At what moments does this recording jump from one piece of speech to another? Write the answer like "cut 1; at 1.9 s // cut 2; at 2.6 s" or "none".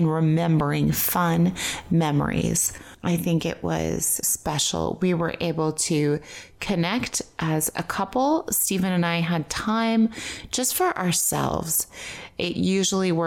cut 1; at 4.2 s